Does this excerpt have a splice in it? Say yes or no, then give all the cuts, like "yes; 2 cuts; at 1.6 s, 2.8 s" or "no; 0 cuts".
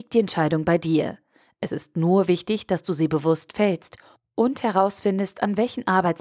no; 0 cuts